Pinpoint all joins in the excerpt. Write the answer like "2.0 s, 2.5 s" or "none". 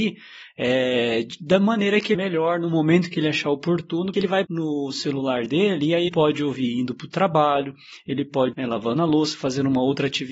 2.1 s, 4.1 s, 4.4 s, 6.1 s, 8.5 s